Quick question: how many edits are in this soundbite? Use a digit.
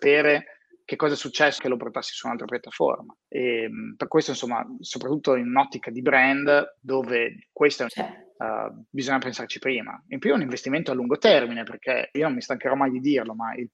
5